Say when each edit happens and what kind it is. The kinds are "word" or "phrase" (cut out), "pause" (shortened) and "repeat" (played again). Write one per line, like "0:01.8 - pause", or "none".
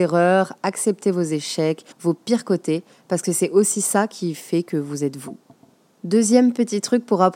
0:01.9 - pause